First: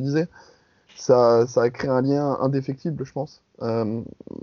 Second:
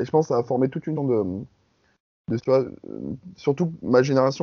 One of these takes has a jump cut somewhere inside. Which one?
second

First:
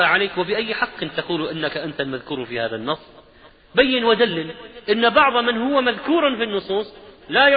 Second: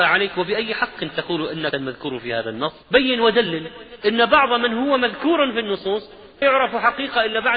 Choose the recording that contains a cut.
second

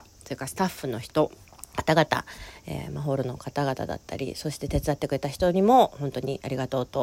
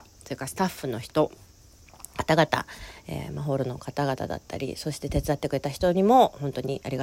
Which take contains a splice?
first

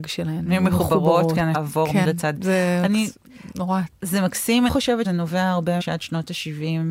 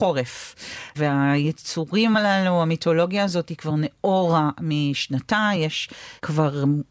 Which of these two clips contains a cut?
first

